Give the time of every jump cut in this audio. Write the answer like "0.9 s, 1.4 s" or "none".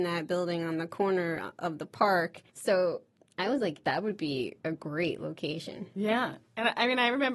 2.5 s